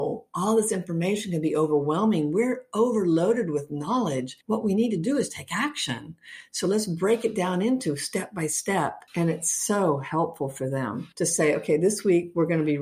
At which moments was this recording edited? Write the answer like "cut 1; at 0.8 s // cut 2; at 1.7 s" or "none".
cut 1; at 4.4 s // cut 2; at 9.1 s // cut 3; at 11.1 s